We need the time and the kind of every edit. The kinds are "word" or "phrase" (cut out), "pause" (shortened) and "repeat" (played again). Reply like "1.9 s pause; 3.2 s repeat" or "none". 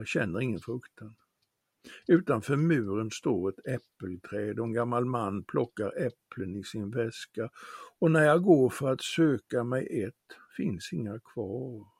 none